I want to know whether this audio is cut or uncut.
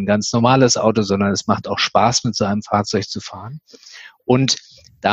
uncut